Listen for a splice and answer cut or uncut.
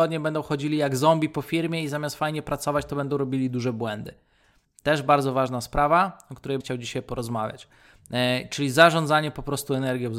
cut